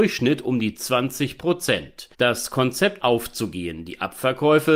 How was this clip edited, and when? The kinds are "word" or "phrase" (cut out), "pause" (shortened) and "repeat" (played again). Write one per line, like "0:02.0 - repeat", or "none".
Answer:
0:02.1 - pause
0:03.0 - word